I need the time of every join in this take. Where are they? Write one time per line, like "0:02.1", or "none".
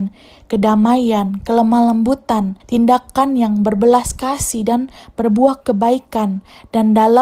0:02.6